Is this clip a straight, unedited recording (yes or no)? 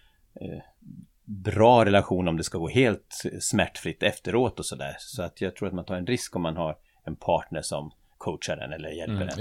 no